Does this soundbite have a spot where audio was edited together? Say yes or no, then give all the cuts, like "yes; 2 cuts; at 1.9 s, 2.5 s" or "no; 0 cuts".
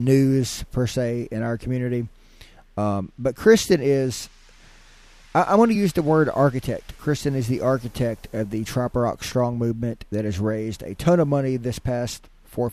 no; 0 cuts